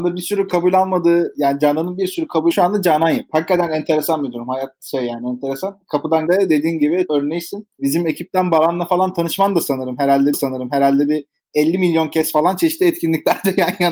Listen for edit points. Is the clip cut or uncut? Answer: cut